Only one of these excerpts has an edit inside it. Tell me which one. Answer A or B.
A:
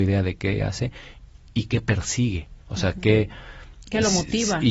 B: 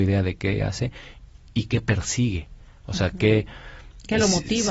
A